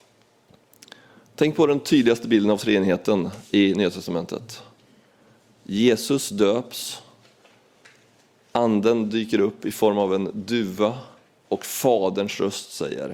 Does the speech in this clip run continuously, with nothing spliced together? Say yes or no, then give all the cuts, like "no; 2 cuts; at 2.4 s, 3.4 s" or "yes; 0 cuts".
yes; 0 cuts